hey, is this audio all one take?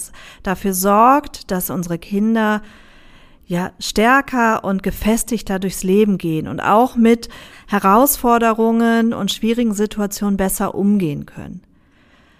yes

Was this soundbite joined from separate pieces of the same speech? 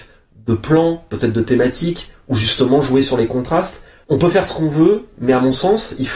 no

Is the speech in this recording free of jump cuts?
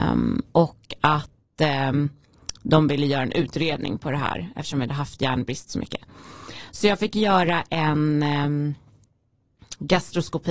yes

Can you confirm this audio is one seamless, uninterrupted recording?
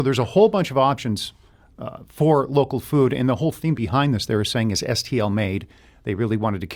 yes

